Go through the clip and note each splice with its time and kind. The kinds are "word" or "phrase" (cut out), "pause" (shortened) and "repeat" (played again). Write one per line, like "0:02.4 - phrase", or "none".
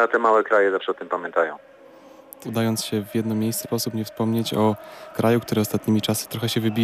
0:02.4 - word
0:03.6 - word
0:05.1 - word